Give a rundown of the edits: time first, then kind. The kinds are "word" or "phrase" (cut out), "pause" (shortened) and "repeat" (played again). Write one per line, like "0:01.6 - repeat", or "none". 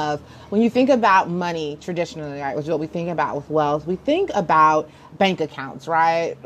none